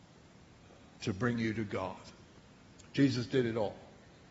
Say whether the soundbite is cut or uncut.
uncut